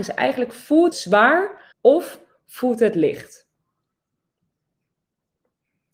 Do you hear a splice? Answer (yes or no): yes